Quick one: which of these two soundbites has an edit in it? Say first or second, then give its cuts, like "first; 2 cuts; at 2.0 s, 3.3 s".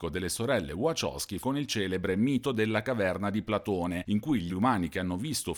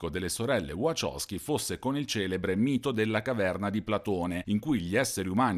first; 2 cuts; at 1.4 s, 4.5 s